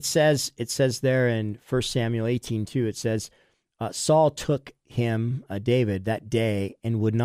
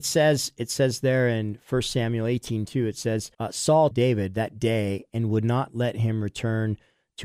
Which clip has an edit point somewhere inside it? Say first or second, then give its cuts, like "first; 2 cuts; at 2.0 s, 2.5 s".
second; 2 cuts; at 3.3 s, 3.9 s